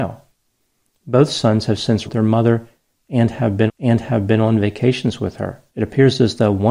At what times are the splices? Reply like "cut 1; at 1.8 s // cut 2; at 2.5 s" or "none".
cut 1; at 2.1 s // cut 2; at 3.7 s // cut 3; at 5.7 s